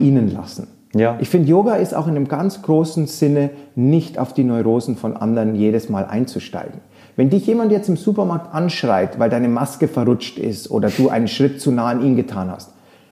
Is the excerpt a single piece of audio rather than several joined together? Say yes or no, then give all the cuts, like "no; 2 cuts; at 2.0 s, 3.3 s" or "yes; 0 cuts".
yes; 0 cuts